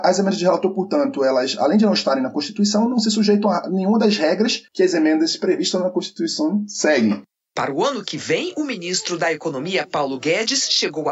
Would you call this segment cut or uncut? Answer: cut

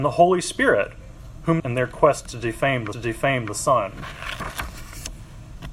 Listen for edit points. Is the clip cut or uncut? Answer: cut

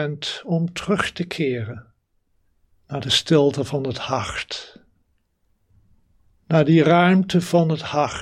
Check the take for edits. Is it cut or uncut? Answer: uncut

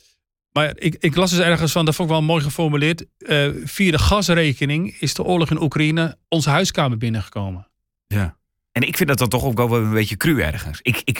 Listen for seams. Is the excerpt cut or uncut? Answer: cut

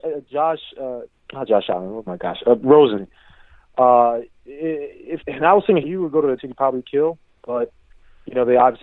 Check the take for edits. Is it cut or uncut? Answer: cut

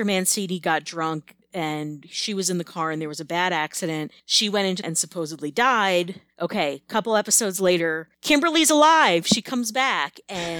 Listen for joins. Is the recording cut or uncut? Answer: cut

